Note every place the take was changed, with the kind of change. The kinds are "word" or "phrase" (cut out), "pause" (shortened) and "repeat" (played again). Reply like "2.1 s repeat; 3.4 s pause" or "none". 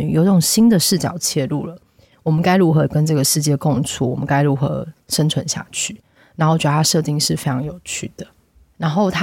none

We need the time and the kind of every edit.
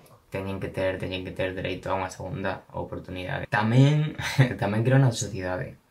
1.0 s word

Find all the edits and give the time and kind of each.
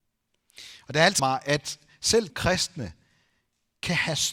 1.2 s word; 2.3 s word

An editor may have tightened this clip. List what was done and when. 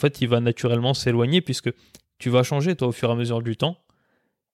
none

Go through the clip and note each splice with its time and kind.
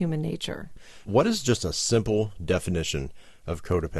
none

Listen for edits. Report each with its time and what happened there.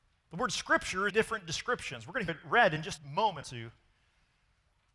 1.1 s phrase; 2.3 s word; 3.0 s word; 3.4 s word

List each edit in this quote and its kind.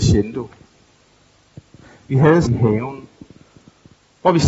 2.4 s word

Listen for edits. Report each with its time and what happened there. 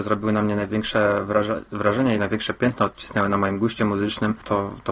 2.2 s word

